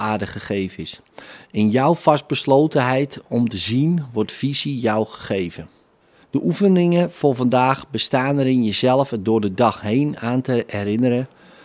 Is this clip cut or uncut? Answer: uncut